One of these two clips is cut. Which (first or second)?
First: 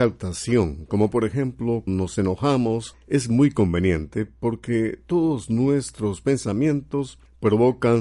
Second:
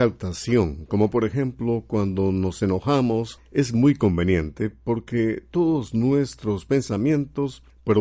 first